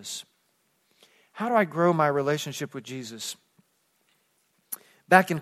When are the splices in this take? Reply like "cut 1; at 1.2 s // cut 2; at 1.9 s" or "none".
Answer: none